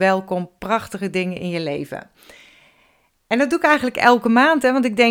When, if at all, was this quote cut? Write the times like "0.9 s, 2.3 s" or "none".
none